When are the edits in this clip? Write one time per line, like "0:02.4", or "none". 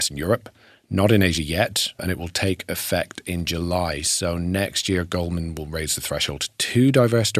0:02.0